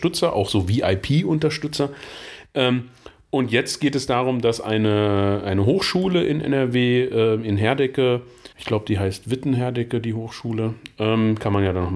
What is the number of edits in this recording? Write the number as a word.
one